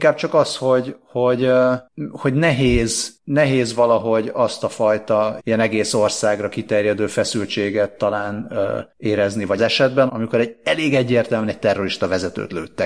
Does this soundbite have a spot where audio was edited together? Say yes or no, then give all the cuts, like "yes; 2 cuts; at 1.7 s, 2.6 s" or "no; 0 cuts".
yes; 3 cuts; at 5.4 s, 9.6 s, 10.1 s